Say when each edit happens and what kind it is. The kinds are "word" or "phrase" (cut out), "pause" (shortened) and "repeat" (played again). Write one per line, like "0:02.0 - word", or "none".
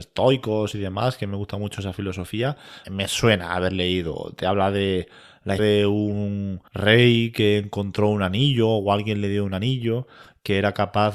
0:02.8 - word
0:05.6 - word
0:06.7 - pause